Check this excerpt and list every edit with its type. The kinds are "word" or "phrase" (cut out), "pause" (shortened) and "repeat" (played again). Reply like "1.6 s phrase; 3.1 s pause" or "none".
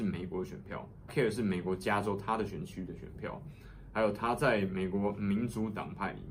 1.1 s word

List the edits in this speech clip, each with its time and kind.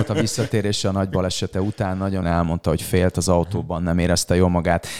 2.2 s word

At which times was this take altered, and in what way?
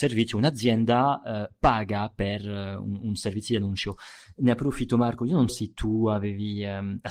5.5 s word

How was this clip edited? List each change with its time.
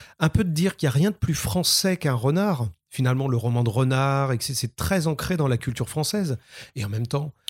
none

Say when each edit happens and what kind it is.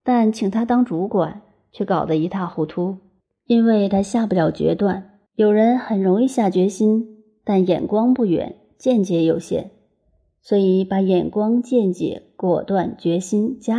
5.3 s pause

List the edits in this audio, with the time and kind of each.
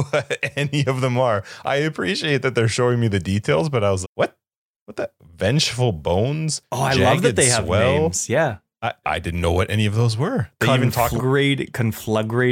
4.0 s word; 9.0 s word; 11.2 s word

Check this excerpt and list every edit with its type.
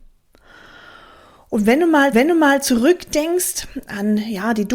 2.1 s repeat

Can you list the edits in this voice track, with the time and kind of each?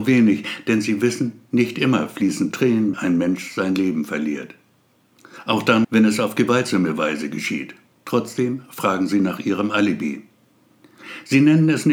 2.9 s word; 5.8 s word; 7.9 s pause

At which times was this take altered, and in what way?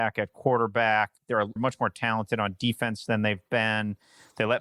1.6 s word

